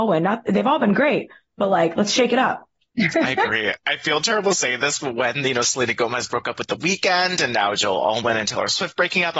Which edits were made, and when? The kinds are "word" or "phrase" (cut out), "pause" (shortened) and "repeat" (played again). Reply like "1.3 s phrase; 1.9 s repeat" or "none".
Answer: none